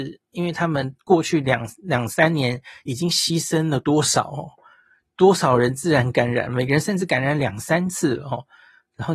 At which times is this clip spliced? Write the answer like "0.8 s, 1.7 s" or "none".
none